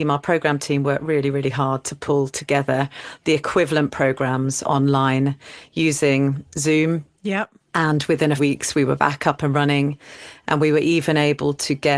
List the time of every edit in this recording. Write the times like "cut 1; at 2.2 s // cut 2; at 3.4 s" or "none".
cut 1; at 8.4 s